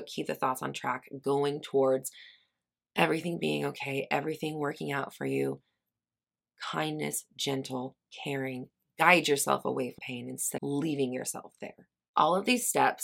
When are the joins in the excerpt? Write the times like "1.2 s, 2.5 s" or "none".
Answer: 10.0 s, 10.6 s